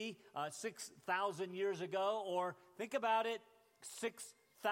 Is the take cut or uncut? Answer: uncut